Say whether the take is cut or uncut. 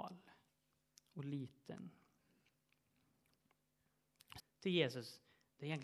cut